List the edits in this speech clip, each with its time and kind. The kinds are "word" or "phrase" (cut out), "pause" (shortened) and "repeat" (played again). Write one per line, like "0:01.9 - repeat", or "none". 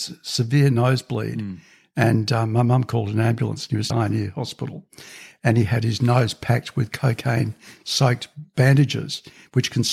0:03.9 - phrase